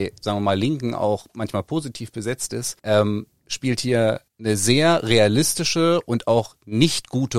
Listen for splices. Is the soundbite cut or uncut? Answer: cut